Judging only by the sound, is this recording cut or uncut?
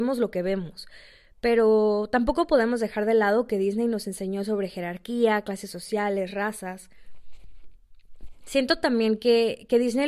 uncut